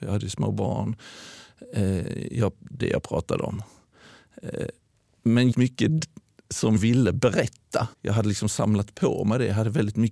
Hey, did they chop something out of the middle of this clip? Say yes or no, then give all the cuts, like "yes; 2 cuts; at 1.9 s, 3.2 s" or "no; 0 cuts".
yes; 4 cuts; at 2.8 s, 5.5 s, 6.8 s, 7.9 s